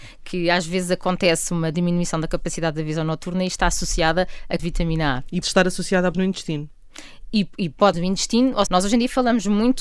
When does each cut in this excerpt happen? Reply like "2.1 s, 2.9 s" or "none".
4.6 s, 5.4 s, 6.1 s, 7.9 s, 8.7 s